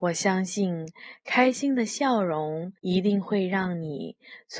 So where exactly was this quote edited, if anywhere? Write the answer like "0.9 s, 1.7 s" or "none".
2.8 s